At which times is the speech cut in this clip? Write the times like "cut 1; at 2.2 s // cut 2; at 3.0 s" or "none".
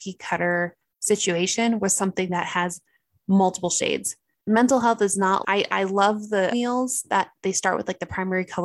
cut 1; at 5.4 s // cut 2; at 6.5 s